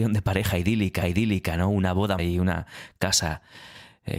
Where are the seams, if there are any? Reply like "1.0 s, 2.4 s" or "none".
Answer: 1.0 s, 2.2 s